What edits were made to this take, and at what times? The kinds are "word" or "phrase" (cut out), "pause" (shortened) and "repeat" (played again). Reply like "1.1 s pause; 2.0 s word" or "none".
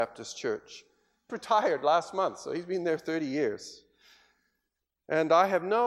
1.3 s phrase